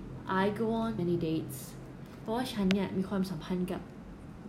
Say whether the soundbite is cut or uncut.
cut